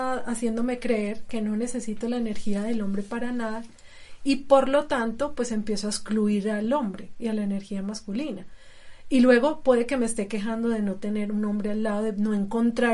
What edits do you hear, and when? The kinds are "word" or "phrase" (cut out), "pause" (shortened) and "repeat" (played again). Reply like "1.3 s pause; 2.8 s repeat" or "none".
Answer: none